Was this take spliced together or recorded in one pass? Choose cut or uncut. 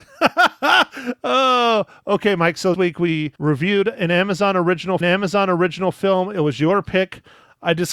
cut